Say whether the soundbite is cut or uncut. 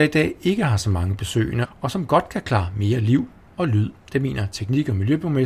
uncut